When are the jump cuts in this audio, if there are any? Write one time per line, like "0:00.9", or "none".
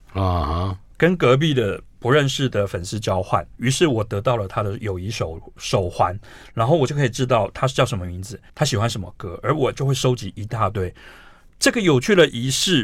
0:08.5